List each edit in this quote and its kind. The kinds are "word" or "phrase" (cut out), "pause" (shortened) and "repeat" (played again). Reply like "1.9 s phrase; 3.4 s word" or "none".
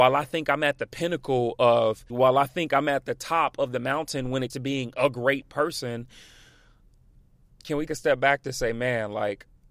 2.1 s word; 4.5 s word; 7.9 s word